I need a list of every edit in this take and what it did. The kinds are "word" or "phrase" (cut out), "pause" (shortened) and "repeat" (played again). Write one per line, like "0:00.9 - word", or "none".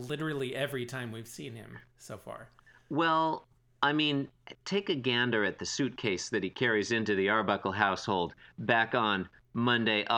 0:01.9 - pause
0:03.6 - pause